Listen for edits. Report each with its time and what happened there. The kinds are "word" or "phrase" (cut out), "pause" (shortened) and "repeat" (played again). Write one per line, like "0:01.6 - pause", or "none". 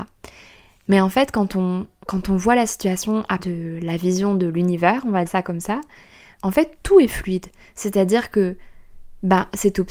0:03.4 - word
0:05.2 - word
0:06.4 - word